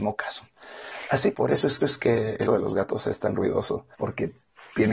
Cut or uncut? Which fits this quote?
cut